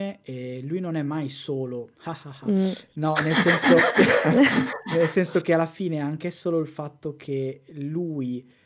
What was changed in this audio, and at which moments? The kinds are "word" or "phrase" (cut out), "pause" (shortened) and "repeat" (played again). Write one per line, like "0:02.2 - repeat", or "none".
none

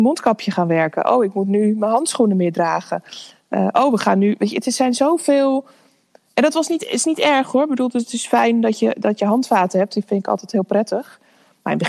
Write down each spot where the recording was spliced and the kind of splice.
none

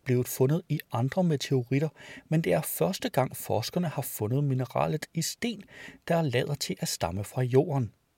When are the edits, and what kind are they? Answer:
none

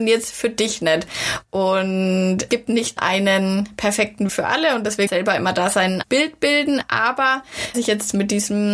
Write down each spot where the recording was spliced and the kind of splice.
0:02.5 - phrase
0:03.0 - word
0:04.3 - word
0:05.1 - phrase
0:06.0 - word
0:07.7 - word

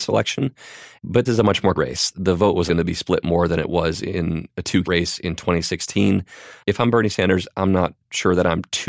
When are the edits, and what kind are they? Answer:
0:01.3 - word
0:01.8 - word
0:02.7 - word
0:04.8 - word

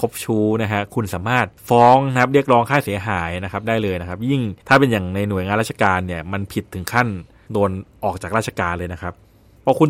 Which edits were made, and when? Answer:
0:01.5 - pause
0:04.6 - pause

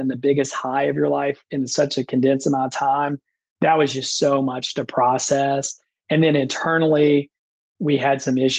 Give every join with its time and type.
none

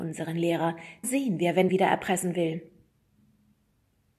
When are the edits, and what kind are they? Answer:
0:01.0 - word
0:01.7 - phrase

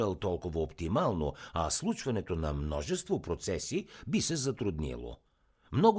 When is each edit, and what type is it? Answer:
none

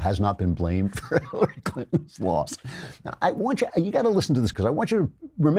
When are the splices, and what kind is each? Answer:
0:03.7 - word
0:04.5 - word

